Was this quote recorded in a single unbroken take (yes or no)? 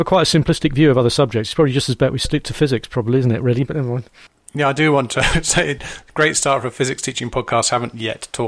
yes